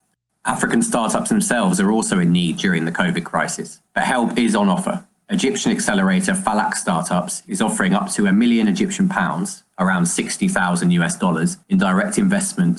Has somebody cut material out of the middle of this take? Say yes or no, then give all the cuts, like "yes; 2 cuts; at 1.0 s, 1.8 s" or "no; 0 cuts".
yes; 2 cuts; at 3.9 s, 11.6 s